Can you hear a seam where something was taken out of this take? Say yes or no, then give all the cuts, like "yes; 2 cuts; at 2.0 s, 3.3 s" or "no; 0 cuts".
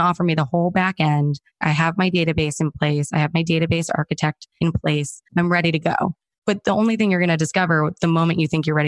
yes; 1 cut; at 5.3 s